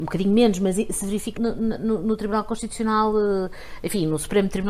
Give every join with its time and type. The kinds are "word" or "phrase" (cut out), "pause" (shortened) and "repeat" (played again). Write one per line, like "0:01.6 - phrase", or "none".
0:01.4 - word